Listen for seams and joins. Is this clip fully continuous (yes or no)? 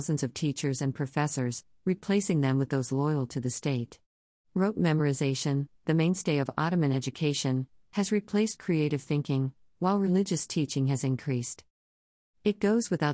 yes